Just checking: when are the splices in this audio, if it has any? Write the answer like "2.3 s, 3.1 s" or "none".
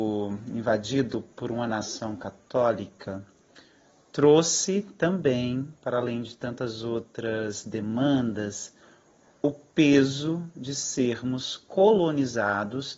none